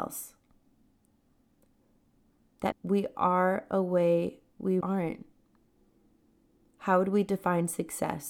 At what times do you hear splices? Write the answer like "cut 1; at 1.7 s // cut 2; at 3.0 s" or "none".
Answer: cut 1; at 2.7 s // cut 2; at 4.8 s